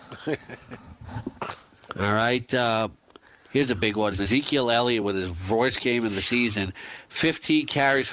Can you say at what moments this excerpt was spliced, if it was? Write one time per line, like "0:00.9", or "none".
none